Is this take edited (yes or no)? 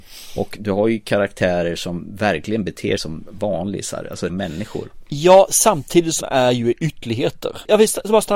yes